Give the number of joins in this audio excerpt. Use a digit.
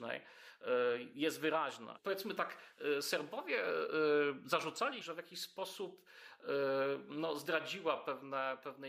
1